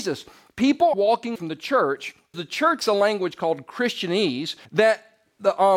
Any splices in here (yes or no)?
yes